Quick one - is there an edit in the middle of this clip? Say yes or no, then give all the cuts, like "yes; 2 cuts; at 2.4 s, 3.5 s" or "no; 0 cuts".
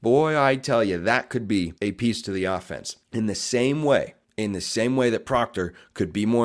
yes; 3 cuts; at 1.8 s, 3.0 s, 4.2 s